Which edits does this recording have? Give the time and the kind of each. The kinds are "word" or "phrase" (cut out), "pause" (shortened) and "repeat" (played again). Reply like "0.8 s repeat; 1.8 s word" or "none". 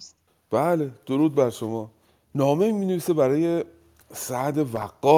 none